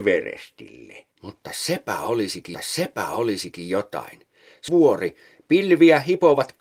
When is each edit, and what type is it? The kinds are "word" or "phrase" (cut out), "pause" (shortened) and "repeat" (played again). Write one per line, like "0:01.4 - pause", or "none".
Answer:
0:01.1 - pause
0:02.5 - repeat
0:04.7 - phrase